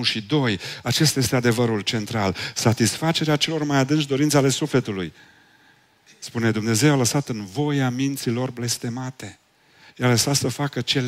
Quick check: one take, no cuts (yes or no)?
yes